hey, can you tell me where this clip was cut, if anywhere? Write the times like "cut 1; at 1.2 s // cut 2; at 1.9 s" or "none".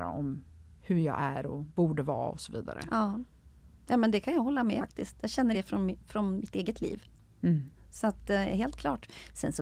cut 1; at 4.8 s // cut 2; at 5.5 s // cut 3; at 7.8 s